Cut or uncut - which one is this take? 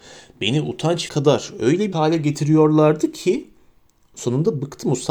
cut